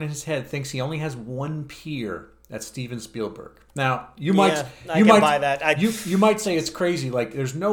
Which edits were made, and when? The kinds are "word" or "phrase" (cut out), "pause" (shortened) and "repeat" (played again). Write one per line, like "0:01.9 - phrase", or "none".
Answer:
none